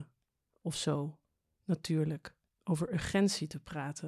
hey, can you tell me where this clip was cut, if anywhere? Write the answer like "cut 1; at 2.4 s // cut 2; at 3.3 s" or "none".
cut 1; at 2.5 s